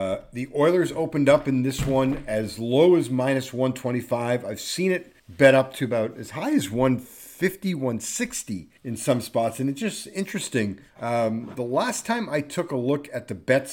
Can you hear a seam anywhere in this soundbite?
yes; 3 cuts; at 5.2 s, 8.8 s, 10.9 s

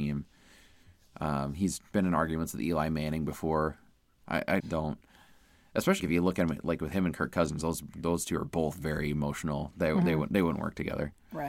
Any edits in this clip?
yes; 2 cuts; at 4.6 s, 6.0 s

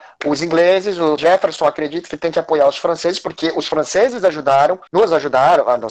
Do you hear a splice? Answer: yes; 2 cuts; at 1.2 s, 4.9 s

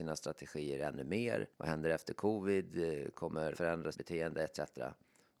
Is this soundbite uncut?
no; 3 cuts; at 1.5 s, 3.5 s, 3.9 s

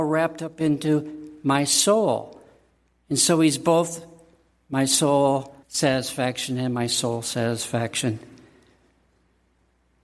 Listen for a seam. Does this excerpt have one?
yes; 1 cut; at 5.6 s

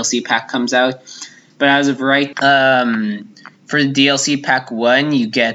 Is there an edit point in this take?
yes; 1 cut; at 2.3 s

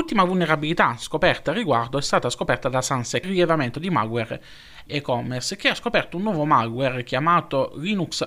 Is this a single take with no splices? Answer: no; 2 cuts; at 3.2 s, 4.9 s

